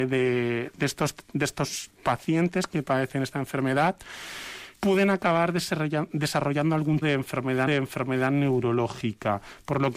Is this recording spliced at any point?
yes; 3 cuts; at 4.7 s, 7.0 s, 7.7 s

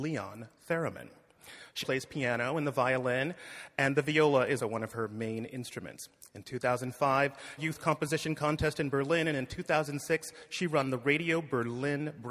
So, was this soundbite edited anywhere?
yes; 3 cuts; at 1.8 s, 4.6 s, 7.6 s

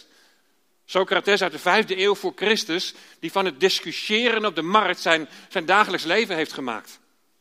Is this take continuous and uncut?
yes; 0 cuts

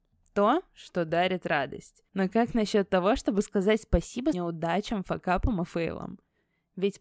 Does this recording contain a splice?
yes; 2 cuts; at 2.1 s, 4.3 s

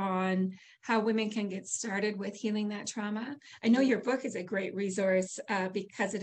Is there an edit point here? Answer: no; 0 cuts

